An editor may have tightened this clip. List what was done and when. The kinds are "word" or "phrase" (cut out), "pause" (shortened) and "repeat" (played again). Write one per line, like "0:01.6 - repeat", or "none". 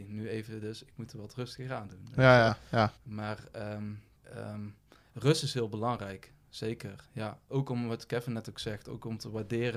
0:02.5 - word
0:03.0 - pause
0:04.2 - pause